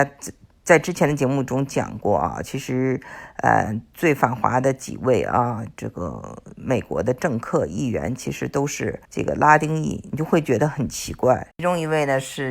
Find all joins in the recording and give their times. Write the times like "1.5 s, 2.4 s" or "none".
9.0 s, 11.5 s